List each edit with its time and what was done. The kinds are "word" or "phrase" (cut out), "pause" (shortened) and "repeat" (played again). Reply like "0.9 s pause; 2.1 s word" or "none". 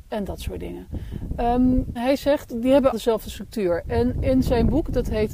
2.0 s word; 2.9 s word